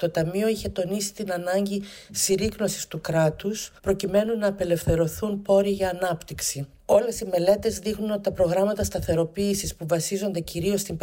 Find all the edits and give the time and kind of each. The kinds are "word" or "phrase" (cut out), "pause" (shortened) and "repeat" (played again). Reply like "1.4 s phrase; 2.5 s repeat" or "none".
3.8 s pause